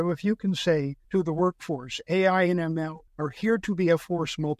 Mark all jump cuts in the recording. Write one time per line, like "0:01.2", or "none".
0:01.0
0:03.1